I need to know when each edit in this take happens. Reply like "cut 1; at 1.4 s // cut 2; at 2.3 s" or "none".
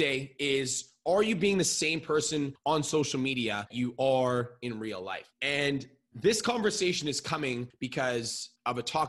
cut 1; at 3.7 s